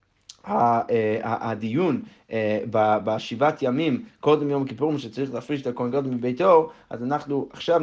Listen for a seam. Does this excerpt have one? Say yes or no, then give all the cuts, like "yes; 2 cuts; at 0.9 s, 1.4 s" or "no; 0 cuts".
no; 0 cuts